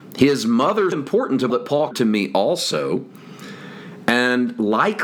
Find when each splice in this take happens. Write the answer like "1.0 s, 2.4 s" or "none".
0.9 s, 1.5 s, 1.9 s